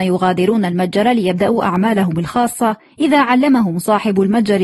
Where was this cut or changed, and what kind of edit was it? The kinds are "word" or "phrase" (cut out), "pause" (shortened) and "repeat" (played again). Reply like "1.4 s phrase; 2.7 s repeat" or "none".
none

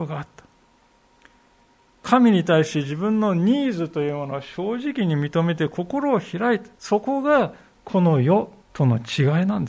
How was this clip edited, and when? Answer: 8.6 s pause

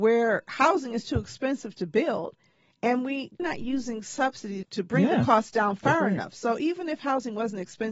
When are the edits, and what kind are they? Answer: 3.4 s word; 4.6 s word

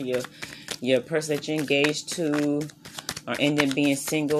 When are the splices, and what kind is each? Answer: none

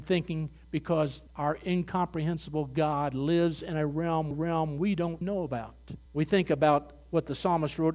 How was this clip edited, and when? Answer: 1.3 s pause; 4.3 s repeat; 5.2 s word; 6.1 s pause

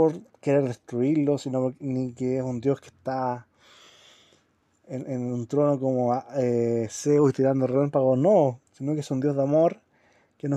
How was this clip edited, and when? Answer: 8.7 s pause

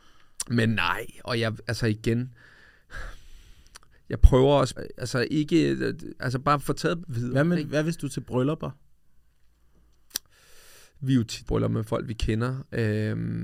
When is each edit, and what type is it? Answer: 3.9 s pause; 4.8 s word; 7.0 s phrase; 11.5 s word

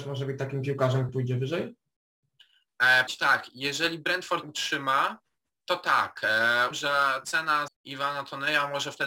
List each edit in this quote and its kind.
1.1 s word; 3.1 s word; 4.4 s word; 6.7 s word; 7.7 s word

